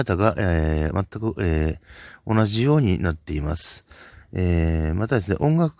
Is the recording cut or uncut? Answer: uncut